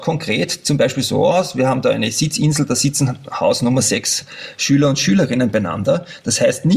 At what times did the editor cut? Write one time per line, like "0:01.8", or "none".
none